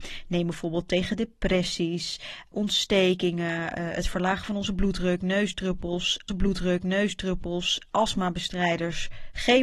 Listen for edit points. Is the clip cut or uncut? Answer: cut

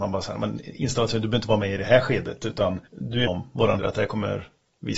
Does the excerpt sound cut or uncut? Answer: cut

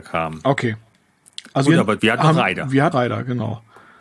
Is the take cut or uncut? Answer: cut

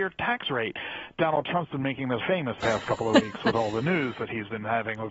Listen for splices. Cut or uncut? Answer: cut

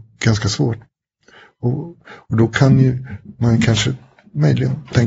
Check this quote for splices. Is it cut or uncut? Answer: uncut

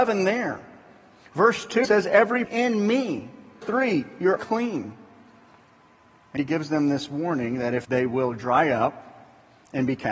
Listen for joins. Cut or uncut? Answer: cut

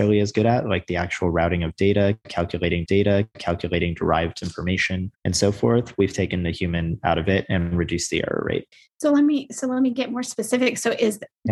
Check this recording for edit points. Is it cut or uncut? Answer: cut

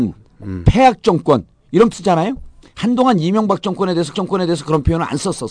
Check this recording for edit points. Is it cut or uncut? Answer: cut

